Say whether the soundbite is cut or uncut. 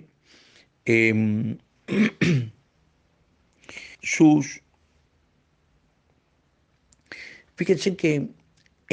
cut